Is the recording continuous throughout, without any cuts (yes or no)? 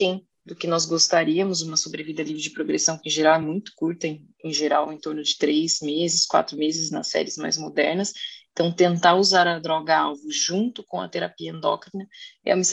yes